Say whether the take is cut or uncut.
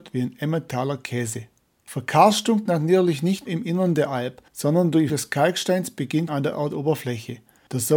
cut